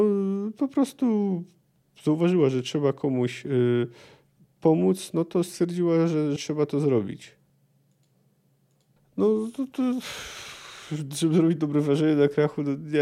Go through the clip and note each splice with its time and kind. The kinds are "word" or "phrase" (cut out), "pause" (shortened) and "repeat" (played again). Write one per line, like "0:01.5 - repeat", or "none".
0:06.4 - phrase